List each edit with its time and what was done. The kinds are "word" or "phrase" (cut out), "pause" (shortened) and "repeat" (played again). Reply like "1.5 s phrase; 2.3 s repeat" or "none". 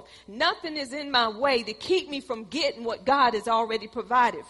none